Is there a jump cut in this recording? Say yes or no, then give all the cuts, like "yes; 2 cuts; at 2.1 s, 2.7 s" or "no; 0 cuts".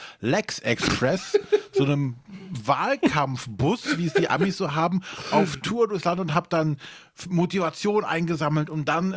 no; 0 cuts